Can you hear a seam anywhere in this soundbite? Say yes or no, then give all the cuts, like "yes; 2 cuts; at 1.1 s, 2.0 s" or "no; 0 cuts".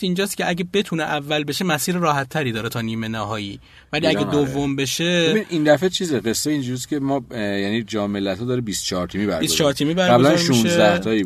no; 0 cuts